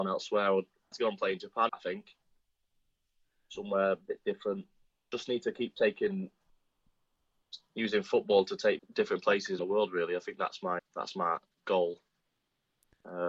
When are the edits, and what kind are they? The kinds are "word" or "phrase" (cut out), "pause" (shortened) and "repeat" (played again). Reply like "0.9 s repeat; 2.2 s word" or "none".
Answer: 0.9 s word; 1.7 s word; 8.8 s word; 9.6 s word; 10.8 s word

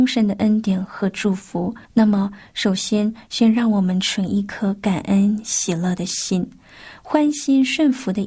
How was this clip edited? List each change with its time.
1.8 s pause

